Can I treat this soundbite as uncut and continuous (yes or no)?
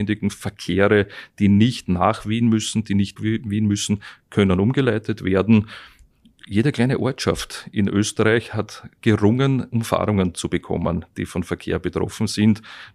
no